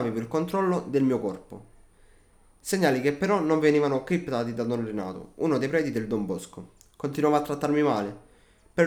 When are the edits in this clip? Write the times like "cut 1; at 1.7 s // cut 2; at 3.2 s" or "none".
none